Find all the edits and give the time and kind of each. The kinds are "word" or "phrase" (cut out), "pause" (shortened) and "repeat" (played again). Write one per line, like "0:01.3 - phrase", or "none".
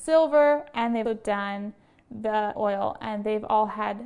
0:01.0 - word
0:02.6 - word